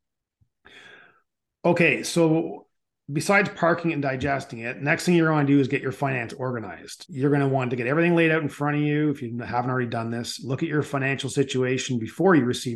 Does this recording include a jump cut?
no; 0 cuts

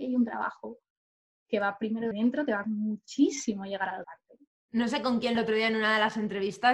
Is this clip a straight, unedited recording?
no; 4 cuts; at 2.1 s, 2.6 s, 4.0 s, 5.4 s

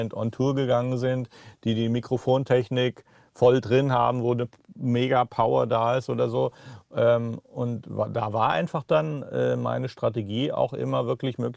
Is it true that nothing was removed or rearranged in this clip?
yes; 0 cuts

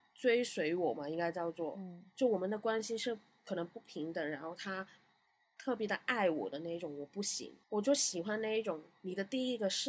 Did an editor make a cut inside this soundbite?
yes; 1 cut; at 7.6 s

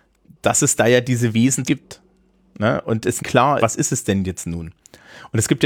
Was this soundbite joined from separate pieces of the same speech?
yes; 3 cuts; at 1.7 s, 3.2 s, 3.6 s

